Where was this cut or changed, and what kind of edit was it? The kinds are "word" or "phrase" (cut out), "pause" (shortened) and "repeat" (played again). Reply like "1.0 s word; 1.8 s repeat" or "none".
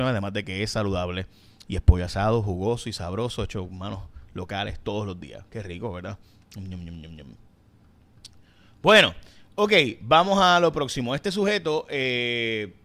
none